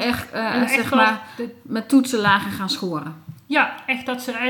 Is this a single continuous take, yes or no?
yes